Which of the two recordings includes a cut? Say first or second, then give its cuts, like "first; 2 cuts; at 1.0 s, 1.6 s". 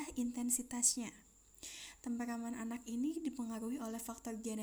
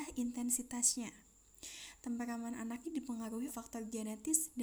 second; 2 cuts; at 2.8 s, 3.5 s